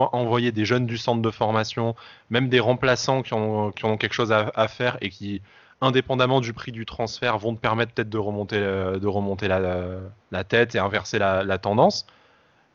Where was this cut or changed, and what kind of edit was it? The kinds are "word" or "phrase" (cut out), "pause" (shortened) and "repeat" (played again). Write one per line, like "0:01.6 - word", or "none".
0:10.2 - pause